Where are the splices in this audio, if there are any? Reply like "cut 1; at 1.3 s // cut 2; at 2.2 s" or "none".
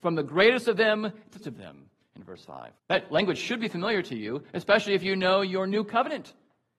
cut 1; at 1.4 s // cut 2; at 2.8 s